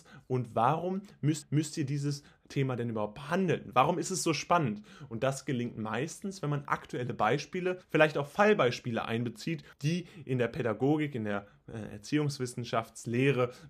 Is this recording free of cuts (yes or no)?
no